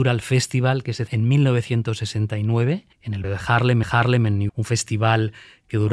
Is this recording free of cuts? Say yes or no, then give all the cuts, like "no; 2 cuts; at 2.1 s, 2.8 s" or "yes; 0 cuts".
no; 5 cuts; at 1.1 s, 2.9 s, 3.2 s, 3.8 s, 4.5 s